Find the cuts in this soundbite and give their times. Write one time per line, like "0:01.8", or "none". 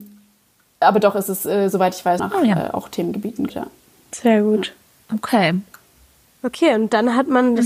0:02.2
0:03.5